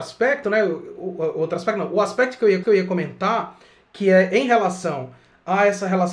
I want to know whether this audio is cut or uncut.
cut